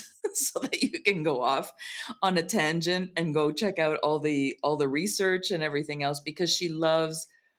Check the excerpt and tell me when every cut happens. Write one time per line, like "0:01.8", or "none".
none